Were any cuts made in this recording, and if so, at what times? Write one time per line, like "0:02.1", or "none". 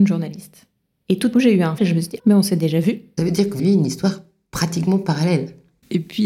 0:01.3
0:01.8
0:02.2
0:03.2
0:03.6